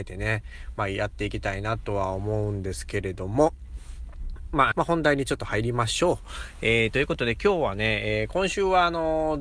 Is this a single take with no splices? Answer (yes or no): no